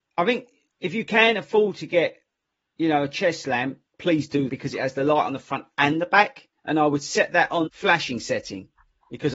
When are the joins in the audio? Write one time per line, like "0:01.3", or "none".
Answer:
0:03.9
0:04.5
0:06.6
0:07.7